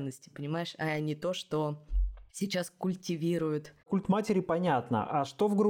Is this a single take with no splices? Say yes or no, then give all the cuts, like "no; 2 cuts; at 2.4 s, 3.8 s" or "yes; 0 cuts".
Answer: no; 2 cuts; at 2.3 s, 3.8 s